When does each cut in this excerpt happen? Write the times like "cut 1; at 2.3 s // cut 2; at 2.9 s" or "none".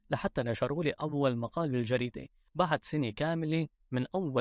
none